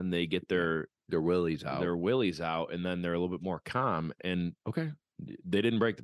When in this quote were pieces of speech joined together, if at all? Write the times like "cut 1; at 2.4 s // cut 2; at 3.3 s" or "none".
cut 1; at 1.0 s // cut 2; at 4.6 s